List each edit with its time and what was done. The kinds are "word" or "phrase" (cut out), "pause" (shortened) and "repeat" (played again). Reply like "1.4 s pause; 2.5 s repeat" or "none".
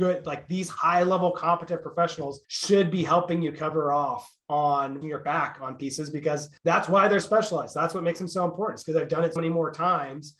2.4 s pause; 5.0 s word; 6.6 s pause; 7.2 s word; 9.4 s word

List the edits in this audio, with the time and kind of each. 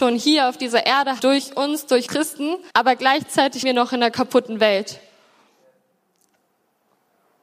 1.2 s word; 2.1 s word; 2.7 s pause; 3.6 s word

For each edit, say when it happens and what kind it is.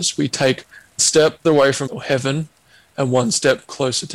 1.0 s word; 1.4 s word; 1.9 s word

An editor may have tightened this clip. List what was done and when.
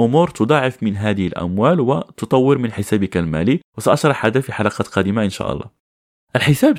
none

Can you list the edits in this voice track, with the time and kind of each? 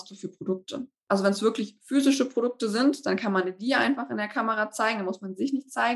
none

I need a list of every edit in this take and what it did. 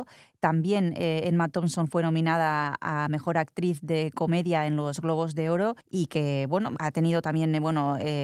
5.8 s pause

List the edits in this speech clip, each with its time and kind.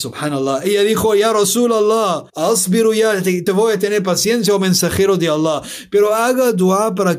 2.3 s pause

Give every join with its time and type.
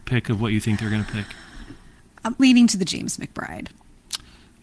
2.4 s word

